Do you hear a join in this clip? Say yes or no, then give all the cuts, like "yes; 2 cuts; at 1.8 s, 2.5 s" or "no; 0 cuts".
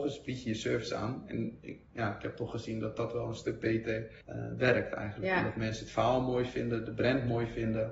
yes; 1 cut; at 4.2 s